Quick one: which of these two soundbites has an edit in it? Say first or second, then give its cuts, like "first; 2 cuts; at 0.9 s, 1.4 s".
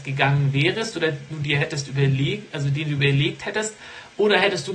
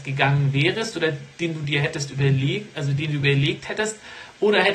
first; 1 cut; at 1.3 s